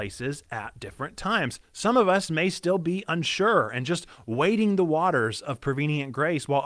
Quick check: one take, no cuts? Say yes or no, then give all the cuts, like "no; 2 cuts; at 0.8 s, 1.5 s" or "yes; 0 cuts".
yes; 0 cuts